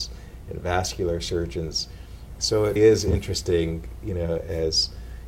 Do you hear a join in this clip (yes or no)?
yes